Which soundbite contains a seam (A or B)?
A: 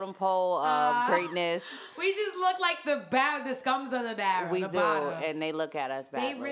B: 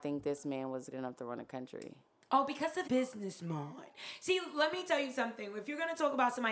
B